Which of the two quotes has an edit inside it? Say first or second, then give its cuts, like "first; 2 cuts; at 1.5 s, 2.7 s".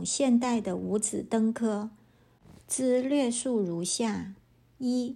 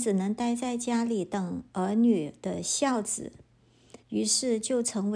second; 1 cut; at 4.0 s